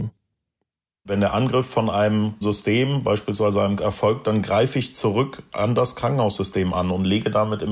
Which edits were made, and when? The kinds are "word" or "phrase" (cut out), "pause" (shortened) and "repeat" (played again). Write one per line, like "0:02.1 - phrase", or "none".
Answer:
0:02.4 - word
0:03.8 - word